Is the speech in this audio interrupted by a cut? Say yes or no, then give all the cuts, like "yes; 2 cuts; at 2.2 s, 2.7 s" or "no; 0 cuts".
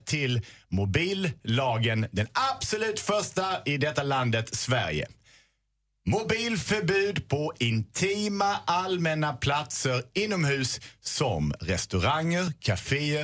no; 0 cuts